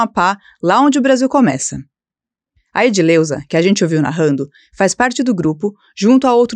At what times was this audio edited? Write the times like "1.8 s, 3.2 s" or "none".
none